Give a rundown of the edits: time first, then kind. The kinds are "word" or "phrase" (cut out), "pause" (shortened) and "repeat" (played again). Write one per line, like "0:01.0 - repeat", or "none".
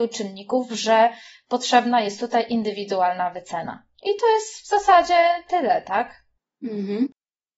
none